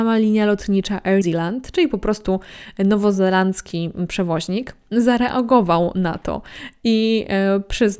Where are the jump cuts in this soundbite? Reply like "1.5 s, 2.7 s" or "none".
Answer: 1.2 s

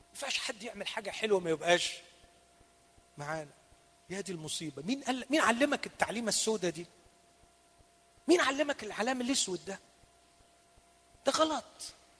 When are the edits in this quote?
none

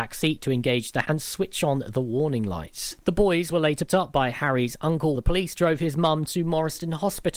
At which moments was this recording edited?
1.0 s, 3.9 s, 5.1 s

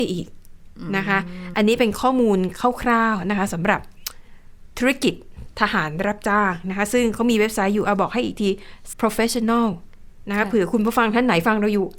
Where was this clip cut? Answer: 1.5 s, 8.9 s

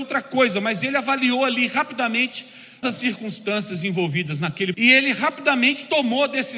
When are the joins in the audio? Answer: 2.8 s, 4.7 s

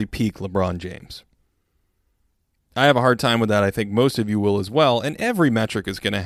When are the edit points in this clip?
none

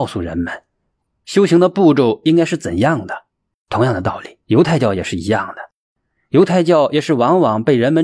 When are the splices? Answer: 4.4 s

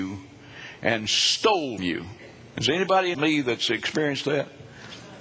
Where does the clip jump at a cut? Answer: 1.8 s, 3.1 s

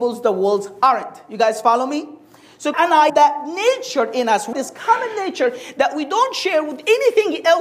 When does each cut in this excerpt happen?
2.7 s, 3.1 s, 4.5 s

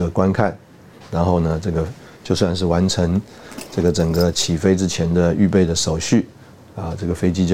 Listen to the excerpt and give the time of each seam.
none

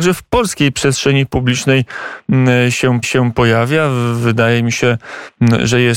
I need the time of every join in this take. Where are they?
3.0 s

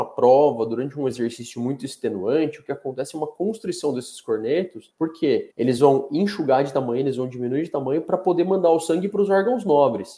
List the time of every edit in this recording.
none

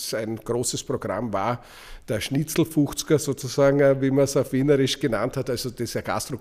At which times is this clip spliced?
none

